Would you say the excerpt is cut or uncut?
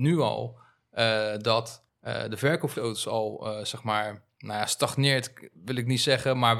cut